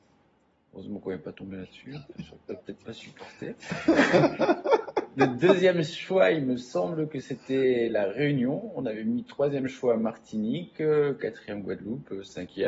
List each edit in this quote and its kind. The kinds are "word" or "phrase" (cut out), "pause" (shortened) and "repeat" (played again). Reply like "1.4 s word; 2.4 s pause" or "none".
none